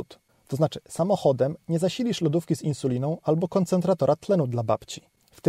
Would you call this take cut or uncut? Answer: uncut